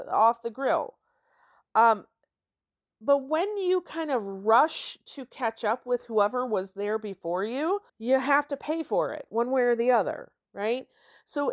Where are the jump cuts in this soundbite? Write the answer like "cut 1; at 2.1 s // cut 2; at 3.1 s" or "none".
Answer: cut 1; at 7.9 s